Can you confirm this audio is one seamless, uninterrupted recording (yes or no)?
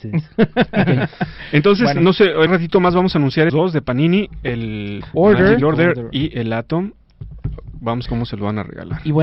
no